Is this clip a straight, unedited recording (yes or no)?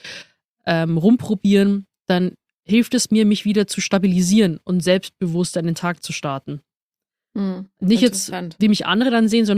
yes